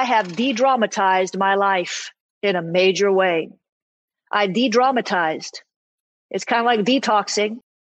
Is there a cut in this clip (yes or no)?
no